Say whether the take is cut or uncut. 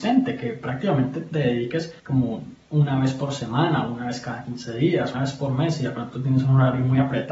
cut